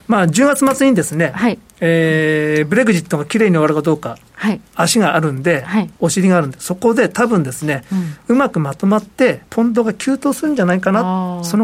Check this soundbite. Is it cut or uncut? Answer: cut